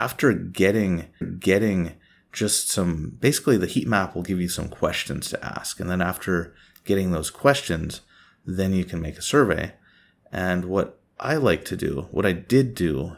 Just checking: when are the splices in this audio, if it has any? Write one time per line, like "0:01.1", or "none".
0:01.2